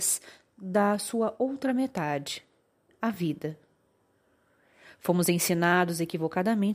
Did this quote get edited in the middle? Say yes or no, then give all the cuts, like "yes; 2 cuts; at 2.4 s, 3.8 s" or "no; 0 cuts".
no; 0 cuts